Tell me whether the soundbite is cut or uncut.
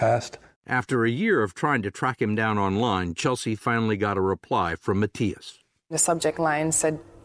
uncut